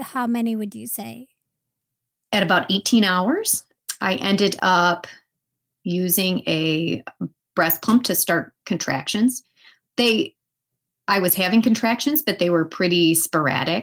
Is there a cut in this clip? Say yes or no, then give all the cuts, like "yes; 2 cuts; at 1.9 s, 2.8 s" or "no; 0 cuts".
no; 0 cuts